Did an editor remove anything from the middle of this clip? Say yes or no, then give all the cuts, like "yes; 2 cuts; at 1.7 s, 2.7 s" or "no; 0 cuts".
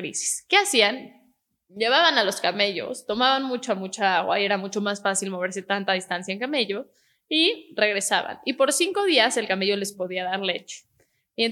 no; 0 cuts